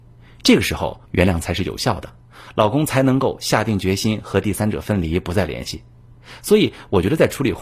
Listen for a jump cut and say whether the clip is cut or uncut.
cut